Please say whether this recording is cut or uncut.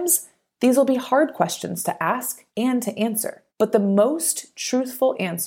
cut